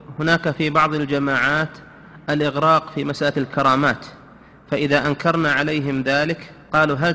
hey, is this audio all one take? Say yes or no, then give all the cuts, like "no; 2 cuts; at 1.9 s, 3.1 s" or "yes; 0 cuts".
yes; 0 cuts